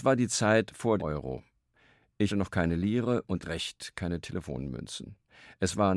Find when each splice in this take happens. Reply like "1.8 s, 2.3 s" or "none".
1.0 s, 2.3 s, 3.4 s